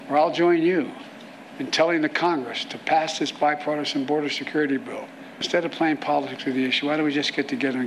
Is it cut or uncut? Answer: uncut